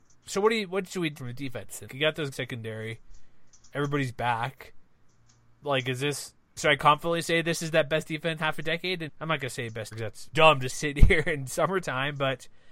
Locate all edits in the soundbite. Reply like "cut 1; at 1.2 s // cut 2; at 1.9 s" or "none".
cut 1; at 1.2 s // cut 2; at 1.9 s // cut 3; at 2.3 s // cut 4; at 6.6 s // cut 5; at 8.4 s // cut 6; at 9.1 s // cut 7; at 9.9 s // cut 8; at 10.3 s // cut 9; at 10.7 s